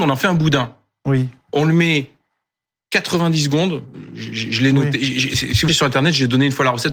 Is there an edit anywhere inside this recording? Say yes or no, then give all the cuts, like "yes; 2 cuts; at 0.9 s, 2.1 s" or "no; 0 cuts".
yes; 1 cut; at 5.7 s